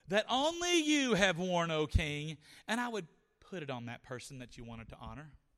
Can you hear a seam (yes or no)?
no